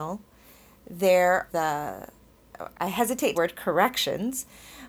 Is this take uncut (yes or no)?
no